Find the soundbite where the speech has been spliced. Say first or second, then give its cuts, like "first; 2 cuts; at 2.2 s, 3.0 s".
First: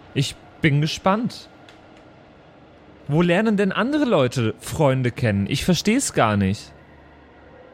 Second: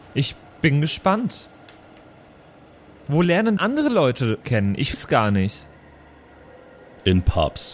second; 3 cuts; at 3.6 s, 4.4 s, 4.9 s